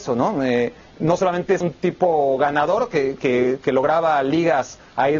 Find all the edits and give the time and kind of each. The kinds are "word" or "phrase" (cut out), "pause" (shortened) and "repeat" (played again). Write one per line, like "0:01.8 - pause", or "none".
0:01.6 - word
0:03.2 - word